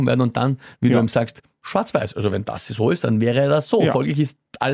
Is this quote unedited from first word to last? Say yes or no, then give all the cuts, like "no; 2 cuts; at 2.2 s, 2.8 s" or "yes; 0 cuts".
yes; 0 cuts